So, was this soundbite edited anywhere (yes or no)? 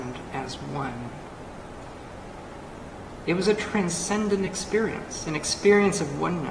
no